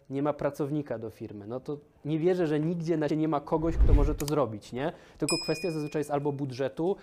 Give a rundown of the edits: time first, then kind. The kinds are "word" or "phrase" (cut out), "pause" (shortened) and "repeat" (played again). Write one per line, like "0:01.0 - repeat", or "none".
0:03.1 - word